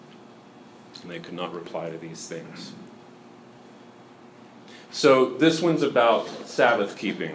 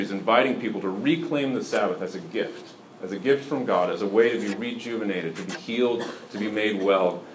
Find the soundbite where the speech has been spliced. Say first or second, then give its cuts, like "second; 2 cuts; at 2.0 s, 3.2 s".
first; 1 cut; at 4.8 s